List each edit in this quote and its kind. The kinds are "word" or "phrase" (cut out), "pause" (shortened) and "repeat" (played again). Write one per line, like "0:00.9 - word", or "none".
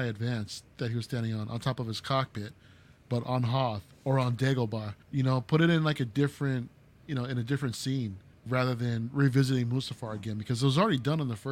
0:05.0 - pause
0:08.3 - pause